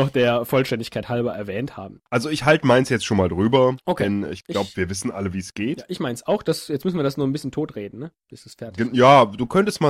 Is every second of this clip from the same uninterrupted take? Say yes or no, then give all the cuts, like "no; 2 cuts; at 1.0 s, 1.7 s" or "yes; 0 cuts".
no; 2 cuts; at 2.1 s, 4.4 s